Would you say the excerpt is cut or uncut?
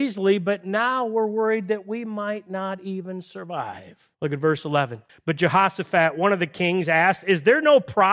cut